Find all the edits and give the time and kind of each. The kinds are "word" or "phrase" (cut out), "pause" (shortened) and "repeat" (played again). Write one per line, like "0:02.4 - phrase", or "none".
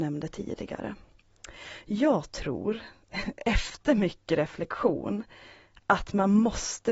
none